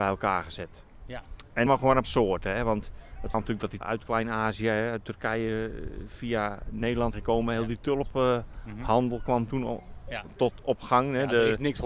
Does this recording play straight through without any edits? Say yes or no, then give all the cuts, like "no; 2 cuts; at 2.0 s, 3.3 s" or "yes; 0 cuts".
no; 5 cuts; at 1.7 s, 2.0 s, 3.3 s, 3.8 s, 7.1 s